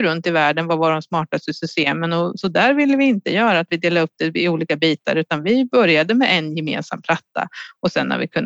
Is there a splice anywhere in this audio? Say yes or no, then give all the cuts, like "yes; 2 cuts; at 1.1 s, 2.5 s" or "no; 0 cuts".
no; 0 cuts